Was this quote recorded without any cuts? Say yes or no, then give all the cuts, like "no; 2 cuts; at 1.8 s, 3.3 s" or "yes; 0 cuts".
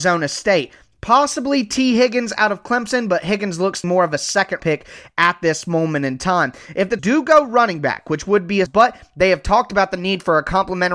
no; 4 cuts; at 3.8 s, 4.6 s, 7.0 s, 8.7 s